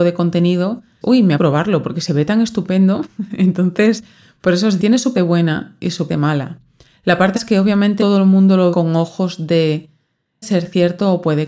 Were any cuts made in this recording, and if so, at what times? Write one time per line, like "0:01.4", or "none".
0:01.0
0:01.4
0:04.8
0:05.1
0:06.1
0:07.3
0:08.0
0:08.7
0:10.4